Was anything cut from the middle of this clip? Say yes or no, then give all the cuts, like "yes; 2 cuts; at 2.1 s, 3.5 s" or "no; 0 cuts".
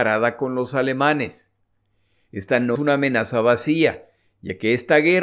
yes; 1 cut; at 2.8 s